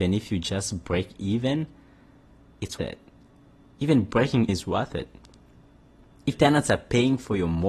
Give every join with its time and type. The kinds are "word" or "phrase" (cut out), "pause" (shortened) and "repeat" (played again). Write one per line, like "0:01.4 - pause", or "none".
0:02.8 - word
0:04.5 - word
0:06.3 - word